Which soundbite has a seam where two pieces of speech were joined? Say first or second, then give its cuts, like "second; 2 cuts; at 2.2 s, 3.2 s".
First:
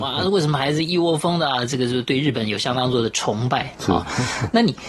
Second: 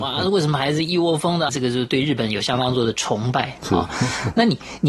second; 1 cut; at 1.5 s